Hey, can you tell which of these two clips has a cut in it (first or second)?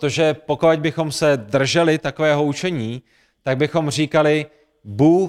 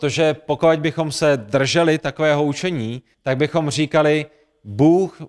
second